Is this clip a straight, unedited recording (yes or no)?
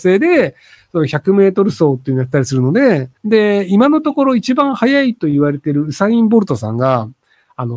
no